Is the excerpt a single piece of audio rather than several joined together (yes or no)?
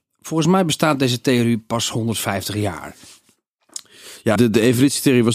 no